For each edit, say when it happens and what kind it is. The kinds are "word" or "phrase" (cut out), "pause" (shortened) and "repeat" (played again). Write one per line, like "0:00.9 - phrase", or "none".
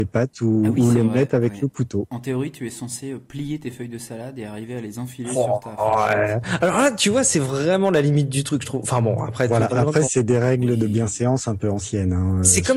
0:09.7 - word
0:10.1 - word